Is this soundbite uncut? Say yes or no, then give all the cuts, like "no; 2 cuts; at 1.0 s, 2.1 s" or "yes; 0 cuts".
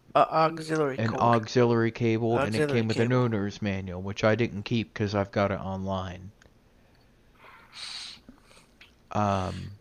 yes; 0 cuts